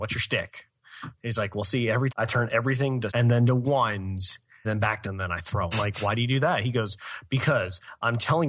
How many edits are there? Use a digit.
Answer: 5